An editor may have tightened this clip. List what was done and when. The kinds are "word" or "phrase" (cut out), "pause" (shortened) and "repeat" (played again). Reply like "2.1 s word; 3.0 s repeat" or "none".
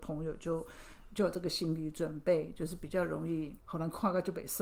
3.6 s pause